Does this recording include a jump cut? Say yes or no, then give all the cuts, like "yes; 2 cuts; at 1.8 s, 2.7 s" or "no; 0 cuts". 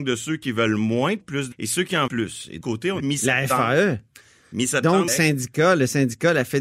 yes; 6 cuts; at 1.2 s, 1.5 s, 2.1 s, 2.6 s, 3.0 s, 5.1 s